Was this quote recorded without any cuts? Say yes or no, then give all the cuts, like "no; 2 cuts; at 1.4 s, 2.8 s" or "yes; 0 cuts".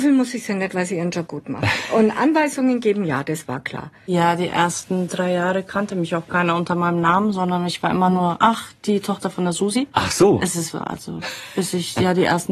no; 3 cuts; at 1.3 s, 9.9 s, 10.7 s